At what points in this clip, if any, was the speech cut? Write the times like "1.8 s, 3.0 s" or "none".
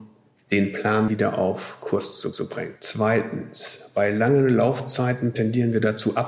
1.1 s, 2.3 s